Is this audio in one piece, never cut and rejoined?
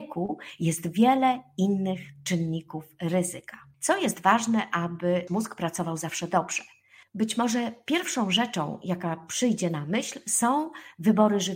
no; 1 cut; at 5.3 s

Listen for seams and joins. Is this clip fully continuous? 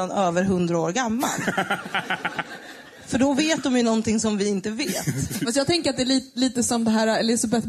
yes; 0 cuts

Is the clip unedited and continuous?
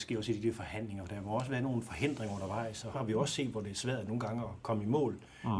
no; 1 cut; at 2.9 s

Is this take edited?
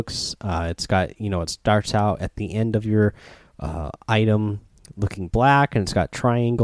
no; 0 cuts

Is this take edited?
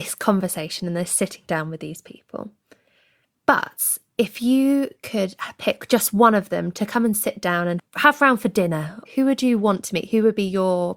no; 0 cuts

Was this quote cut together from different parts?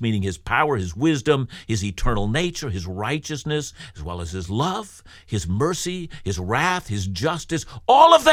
no; 0 cuts

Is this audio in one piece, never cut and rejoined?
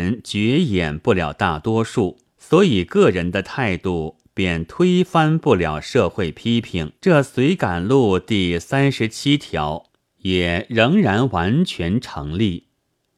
no; 3 cuts; at 2.3 s, 7.0 s, 10.0 s

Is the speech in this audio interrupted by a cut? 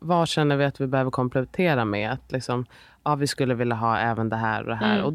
no; 0 cuts

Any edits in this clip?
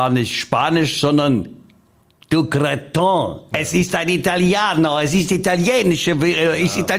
no; 0 cuts

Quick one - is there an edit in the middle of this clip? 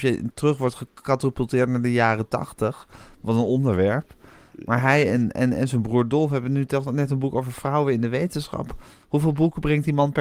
no; 0 cuts

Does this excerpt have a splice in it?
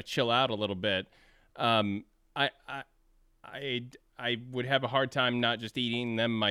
no; 0 cuts

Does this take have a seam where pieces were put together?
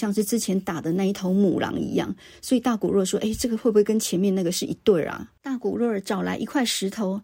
no; 0 cuts

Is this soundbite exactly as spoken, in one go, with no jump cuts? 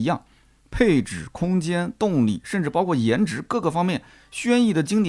yes; 0 cuts

